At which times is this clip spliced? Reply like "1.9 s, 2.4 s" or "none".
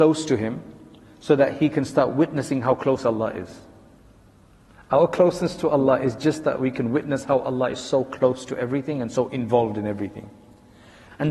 none